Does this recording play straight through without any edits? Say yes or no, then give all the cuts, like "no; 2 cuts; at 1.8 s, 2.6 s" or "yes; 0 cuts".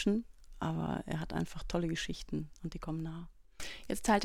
yes; 0 cuts